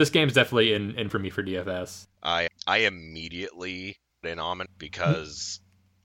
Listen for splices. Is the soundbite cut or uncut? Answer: cut